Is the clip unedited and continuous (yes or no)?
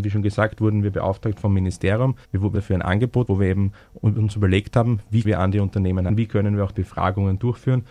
no